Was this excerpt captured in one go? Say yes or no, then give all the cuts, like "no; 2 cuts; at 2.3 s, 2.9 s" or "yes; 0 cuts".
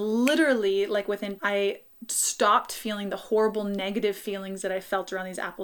no; 1 cut; at 1.4 s